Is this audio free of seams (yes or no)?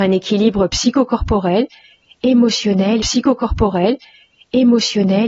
no